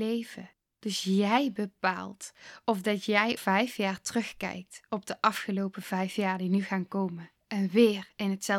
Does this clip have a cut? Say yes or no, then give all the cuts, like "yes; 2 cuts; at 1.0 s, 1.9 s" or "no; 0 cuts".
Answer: yes; 2 cuts; at 3.4 s, 7.4 s